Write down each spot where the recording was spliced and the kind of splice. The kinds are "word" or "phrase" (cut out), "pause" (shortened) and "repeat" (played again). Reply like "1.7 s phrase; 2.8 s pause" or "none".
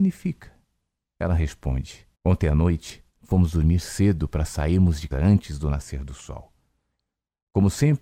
2.1 s pause; 3.1 s pause; 5.1 s word